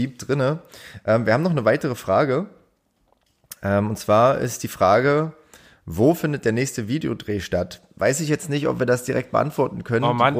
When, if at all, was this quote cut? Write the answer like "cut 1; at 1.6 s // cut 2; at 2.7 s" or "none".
none

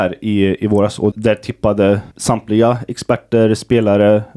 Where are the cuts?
cut 1; at 1.1 s // cut 2; at 2.1 s

